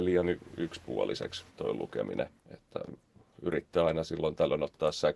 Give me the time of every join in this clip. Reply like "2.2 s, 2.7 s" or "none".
1.5 s, 2.4 s